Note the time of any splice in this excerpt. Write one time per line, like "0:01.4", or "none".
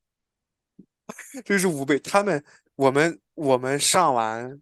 0:03.3